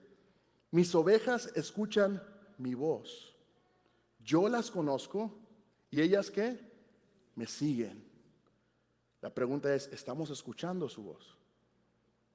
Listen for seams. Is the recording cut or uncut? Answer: uncut